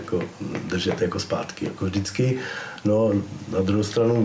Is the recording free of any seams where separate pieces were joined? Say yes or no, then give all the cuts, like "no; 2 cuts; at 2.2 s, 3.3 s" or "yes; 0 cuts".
yes; 0 cuts